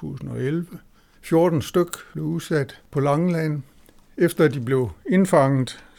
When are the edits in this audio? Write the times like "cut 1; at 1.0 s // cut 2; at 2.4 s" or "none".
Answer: none